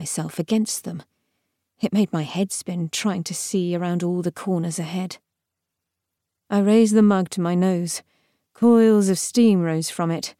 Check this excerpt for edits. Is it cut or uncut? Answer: uncut